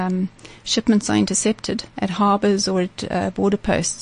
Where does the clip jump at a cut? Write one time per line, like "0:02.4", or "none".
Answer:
0:01.9